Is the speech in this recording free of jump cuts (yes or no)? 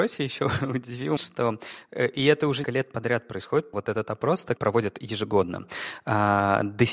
no